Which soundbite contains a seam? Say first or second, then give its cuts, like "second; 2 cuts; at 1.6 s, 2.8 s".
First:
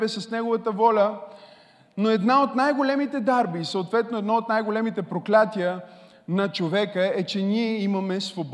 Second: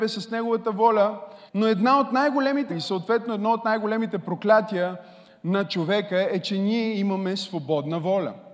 second; 2 cuts; at 1.5 s, 2.7 s